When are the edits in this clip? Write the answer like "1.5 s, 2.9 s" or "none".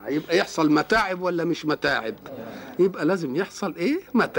none